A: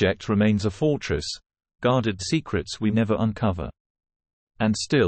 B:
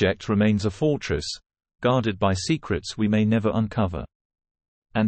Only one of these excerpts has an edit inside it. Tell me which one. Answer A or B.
A